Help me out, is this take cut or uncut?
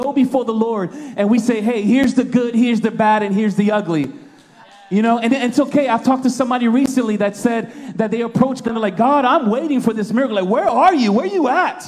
cut